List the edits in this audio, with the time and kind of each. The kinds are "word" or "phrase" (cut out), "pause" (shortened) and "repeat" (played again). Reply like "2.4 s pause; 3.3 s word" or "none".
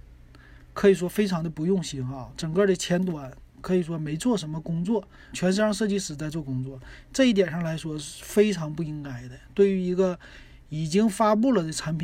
5.3 s word